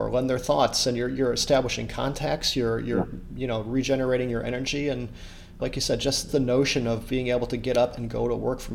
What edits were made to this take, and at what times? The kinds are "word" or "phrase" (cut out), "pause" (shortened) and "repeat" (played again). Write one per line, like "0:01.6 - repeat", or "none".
0:05.6 - word
0:06.3 - word